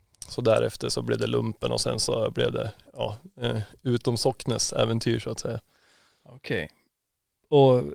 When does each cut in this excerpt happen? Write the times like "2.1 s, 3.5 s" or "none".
none